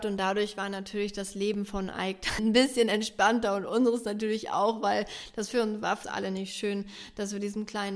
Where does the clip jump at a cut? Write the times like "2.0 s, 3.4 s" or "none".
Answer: 2.4 s, 6.0 s